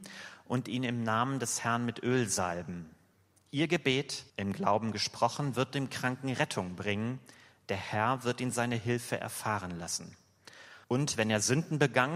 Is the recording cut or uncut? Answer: cut